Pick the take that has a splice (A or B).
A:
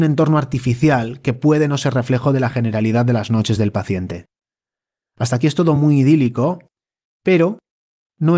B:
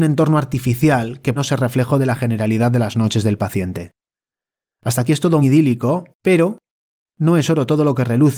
B